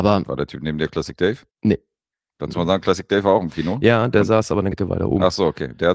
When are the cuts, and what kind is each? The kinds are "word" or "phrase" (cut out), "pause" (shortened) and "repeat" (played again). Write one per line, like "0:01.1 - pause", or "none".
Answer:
0:01.5 - pause
0:02.5 - word
0:04.7 - word